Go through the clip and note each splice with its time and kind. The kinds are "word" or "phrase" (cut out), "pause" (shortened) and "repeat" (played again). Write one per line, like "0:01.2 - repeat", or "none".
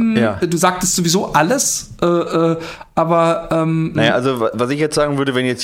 0:04.0 - word